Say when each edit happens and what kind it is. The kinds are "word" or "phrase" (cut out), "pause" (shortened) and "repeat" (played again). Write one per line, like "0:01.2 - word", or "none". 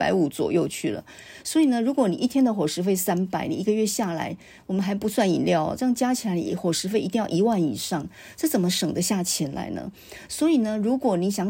none